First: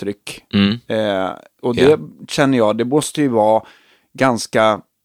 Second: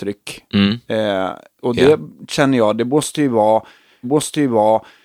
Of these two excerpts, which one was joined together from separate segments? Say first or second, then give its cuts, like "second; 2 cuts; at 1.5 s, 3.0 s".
second; 1 cut; at 4.0 s